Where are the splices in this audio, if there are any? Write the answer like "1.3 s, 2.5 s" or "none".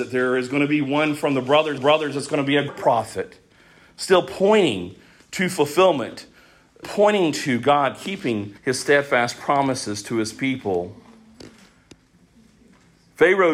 1.8 s, 2.7 s, 6.8 s, 8.6 s